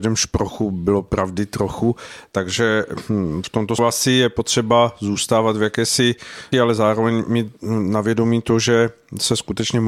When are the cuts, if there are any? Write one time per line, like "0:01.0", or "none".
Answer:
0:03.8
0:06.5